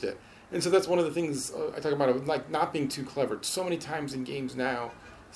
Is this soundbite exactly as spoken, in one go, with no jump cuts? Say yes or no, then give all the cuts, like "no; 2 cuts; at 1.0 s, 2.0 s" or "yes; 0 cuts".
yes; 0 cuts